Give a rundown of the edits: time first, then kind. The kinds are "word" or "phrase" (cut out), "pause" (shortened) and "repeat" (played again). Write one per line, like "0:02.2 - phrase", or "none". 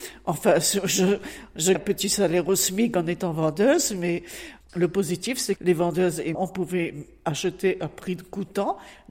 0:01.7 - word
0:05.6 - word
0:06.3 - word